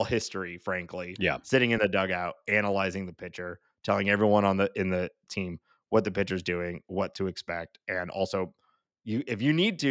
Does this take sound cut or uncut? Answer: uncut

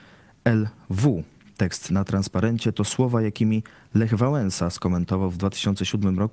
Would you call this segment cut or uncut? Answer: uncut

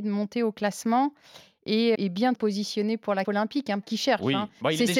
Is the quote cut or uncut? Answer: cut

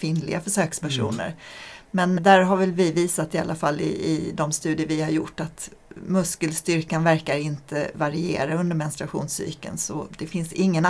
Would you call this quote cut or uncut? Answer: cut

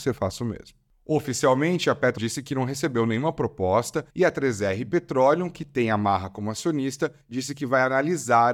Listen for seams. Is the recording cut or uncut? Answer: cut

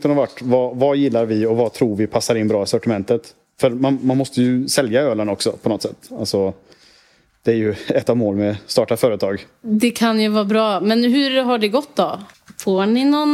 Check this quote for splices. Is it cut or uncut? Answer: uncut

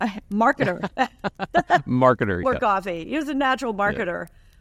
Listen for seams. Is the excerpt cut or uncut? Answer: cut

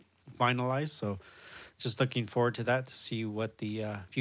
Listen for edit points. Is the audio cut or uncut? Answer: uncut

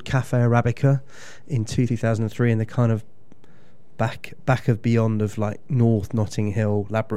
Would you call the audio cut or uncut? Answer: cut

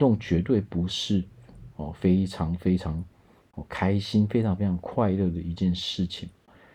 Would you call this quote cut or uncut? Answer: cut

